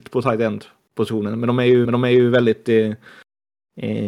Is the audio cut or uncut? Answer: cut